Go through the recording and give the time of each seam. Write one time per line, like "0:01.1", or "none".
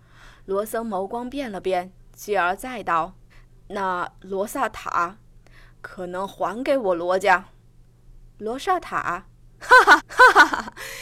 0:03.3
0:07.6
0:10.0